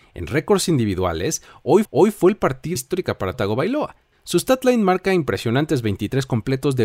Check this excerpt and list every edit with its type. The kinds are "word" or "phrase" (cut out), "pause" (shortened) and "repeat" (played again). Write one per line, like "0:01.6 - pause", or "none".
0:01.8 - repeat
0:02.8 - phrase
0:03.3 - word
0:04.1 - pause